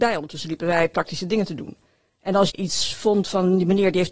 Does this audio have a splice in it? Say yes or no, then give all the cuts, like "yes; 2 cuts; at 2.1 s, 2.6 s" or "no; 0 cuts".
yes; 2 cuts; at 1.9 s, 2.5 s